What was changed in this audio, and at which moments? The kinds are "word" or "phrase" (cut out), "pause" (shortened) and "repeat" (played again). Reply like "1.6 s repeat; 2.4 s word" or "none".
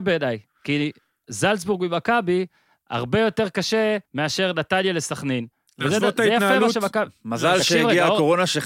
4.1 s pause

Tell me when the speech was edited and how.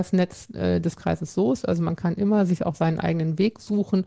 none

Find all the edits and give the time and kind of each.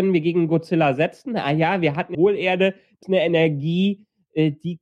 2.1 s phrase; 3.0 s word

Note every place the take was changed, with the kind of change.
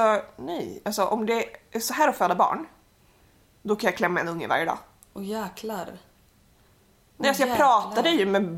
none

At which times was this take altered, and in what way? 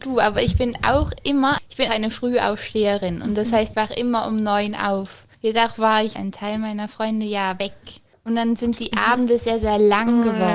1.6 s word; 1.9 s word; 3.7 s word; 5.3 s pause; 6.1 s phrase; 8.1 s pause

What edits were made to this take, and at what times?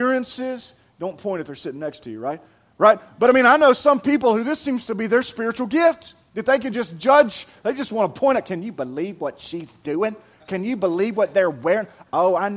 none

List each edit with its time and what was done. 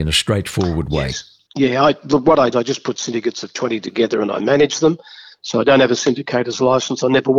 1.5 s pause; 2.5 s phrase

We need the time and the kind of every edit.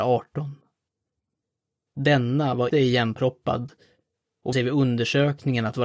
2.7 s word; 4.5 s word

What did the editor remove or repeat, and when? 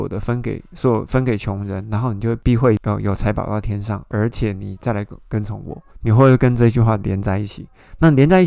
5.9 s pause

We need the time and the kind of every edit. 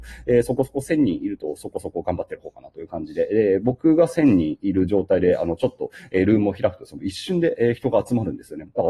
none

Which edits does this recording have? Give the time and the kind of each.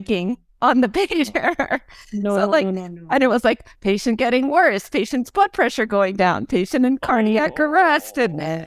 none

